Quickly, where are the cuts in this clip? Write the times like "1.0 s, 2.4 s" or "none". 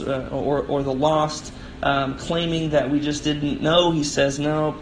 none